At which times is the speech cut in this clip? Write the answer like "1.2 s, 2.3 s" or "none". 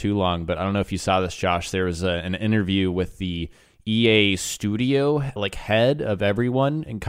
5.4 s